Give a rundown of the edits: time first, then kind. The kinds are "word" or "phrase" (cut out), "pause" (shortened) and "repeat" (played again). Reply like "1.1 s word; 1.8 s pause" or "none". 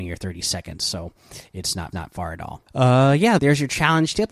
1.9 s repeat; 2.7 s pause; 3.4 s word